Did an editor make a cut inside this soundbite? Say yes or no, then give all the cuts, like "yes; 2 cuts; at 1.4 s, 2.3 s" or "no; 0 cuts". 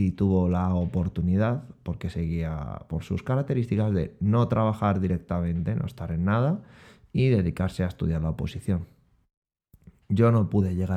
no; 0 cuts